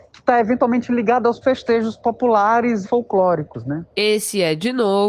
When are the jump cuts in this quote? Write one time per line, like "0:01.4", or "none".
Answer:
0:01.4
0:02.8

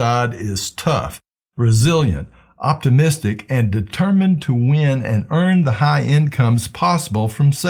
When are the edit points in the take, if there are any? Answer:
none

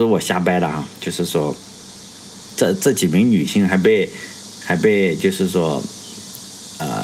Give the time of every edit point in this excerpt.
0:02.5

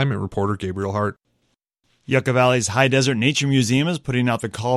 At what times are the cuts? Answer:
none

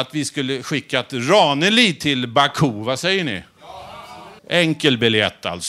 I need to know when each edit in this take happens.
0:04.4

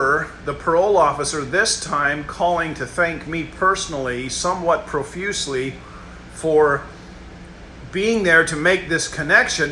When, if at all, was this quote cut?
none

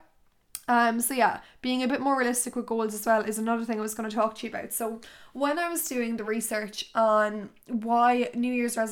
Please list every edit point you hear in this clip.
none

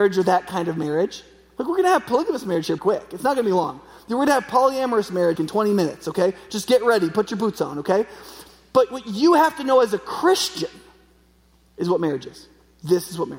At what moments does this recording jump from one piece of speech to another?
0:02.8
0:05.4

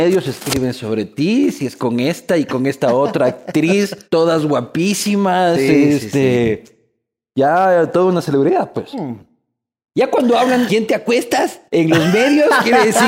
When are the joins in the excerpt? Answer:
0:01.8
0:04.0
0:10.7
0:11.7

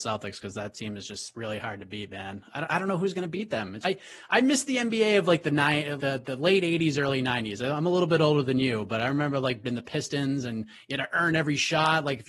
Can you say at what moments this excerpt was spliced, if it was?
0:03.8
0:06.0
0:09.6

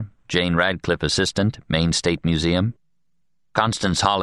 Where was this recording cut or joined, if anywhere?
none

